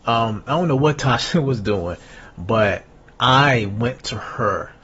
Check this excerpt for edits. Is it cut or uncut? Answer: uncut